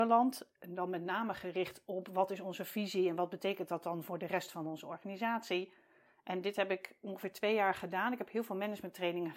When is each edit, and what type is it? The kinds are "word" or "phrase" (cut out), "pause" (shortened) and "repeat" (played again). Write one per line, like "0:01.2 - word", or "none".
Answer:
none